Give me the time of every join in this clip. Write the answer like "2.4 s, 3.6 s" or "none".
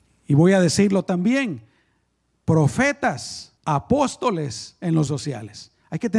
3.6 s, 5.1 s